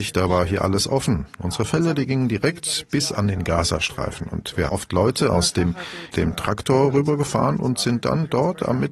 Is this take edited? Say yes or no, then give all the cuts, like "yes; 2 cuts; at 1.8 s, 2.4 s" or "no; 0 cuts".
yes; 2 cuts; at 4.7 s, 6.1 s